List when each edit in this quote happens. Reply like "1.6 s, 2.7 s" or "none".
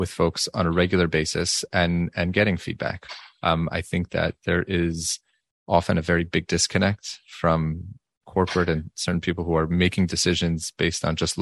none

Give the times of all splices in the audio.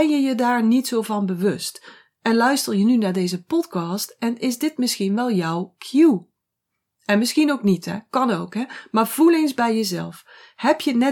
none

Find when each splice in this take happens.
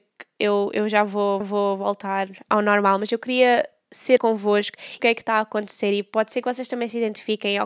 1.4 s, 4.2 s, 5.0 s

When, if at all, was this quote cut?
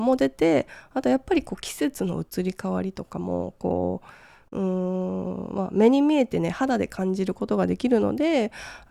none

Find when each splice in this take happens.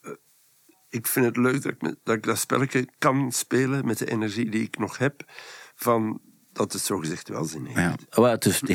none

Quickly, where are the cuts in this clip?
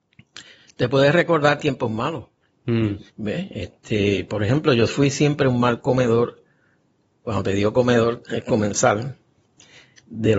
3.1 s

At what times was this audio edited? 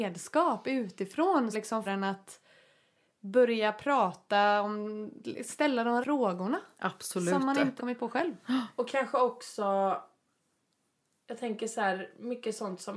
1.5 s, 1.9 s, 6.0 s, 7.8 s

